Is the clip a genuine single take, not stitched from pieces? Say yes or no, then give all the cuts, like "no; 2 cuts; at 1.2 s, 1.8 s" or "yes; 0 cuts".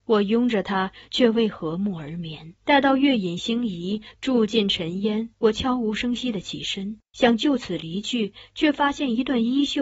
no; 3 cuts; at 2.6 s, 5.3 s, 7.1 s